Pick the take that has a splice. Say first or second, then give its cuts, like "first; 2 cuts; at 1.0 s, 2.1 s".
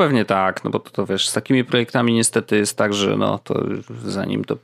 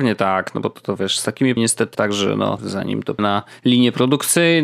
second; 4 cuts; at 1.6 s, 1.9 s, 2.6 s, 3.2 s